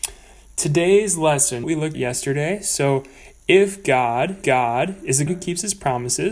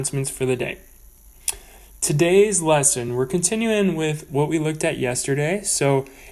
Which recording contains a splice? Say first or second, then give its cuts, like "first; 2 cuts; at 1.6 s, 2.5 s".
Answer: first; 4 cuts; at 1.6 s, 1.9 s, 4.4 s, 5.3 s